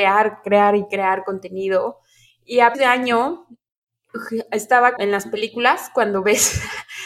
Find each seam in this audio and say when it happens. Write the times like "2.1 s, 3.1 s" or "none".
2.7 s, 5.0 s